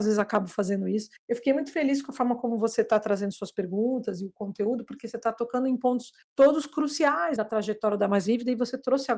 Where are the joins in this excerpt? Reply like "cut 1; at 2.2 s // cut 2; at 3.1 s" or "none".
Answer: cut 1; at 1.2 s // cut 2; at 6.2 s // cut 3; at 7.4 s